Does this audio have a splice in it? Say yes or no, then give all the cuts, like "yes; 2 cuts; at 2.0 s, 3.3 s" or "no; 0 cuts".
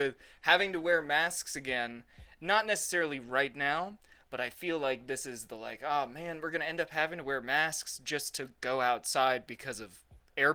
no; 0 cuts